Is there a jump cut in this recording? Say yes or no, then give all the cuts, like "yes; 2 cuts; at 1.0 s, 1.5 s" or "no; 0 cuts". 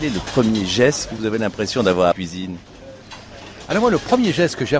yes; 1 cut; at 2.1 s